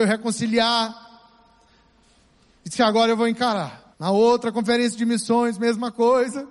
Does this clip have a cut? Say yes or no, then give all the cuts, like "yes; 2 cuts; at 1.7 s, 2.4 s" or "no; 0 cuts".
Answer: yes; 1 cut; at 3.9 s